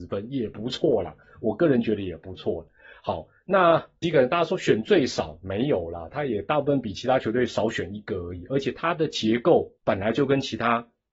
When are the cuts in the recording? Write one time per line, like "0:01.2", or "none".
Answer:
0:09.8